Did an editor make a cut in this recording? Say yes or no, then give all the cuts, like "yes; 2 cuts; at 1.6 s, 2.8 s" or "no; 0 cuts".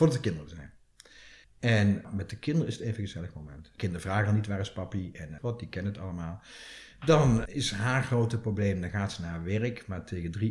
yes; 2 cuts; at 1.4 s, 5.4 s